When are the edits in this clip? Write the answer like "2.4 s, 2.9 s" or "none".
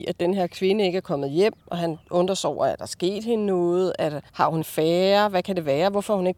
1.6 s, 2.0 s, 4.3 s, 4.6 s